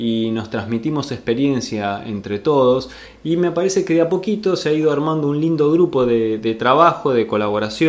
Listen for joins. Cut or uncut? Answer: uncut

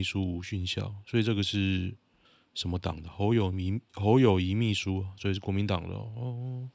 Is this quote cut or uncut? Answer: uncut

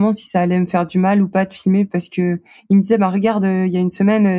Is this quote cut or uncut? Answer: uncut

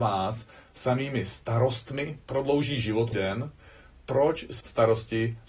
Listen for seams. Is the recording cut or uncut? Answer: cut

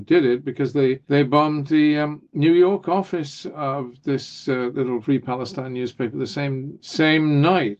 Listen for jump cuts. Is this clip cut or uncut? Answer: uncut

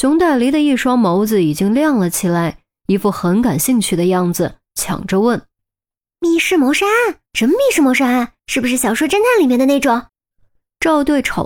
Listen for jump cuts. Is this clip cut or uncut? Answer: cut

